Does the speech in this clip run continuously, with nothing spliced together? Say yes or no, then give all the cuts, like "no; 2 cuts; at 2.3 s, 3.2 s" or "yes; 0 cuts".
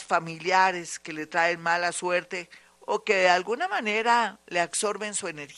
yes; 0 cuts